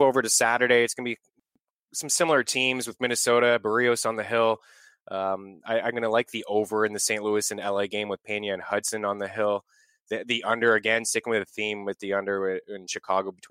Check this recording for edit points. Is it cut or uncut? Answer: uncut